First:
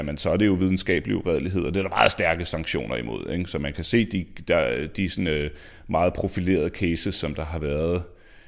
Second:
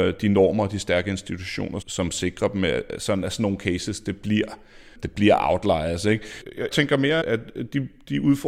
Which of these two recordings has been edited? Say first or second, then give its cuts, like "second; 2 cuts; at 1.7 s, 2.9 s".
second; 3 cuts; at 1.8 s, 6.7 s, 7.2 s